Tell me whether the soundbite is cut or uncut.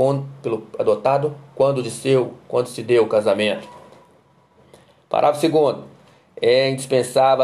uncut